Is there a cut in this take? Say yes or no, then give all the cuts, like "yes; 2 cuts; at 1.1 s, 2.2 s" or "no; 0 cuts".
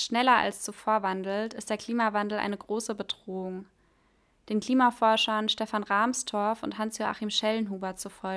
no; 0 cuts